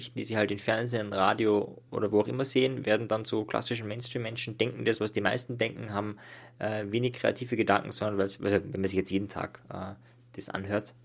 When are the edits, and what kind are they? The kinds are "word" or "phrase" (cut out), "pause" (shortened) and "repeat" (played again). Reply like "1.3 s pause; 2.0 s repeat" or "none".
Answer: none